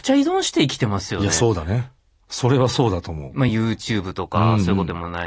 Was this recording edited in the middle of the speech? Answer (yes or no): no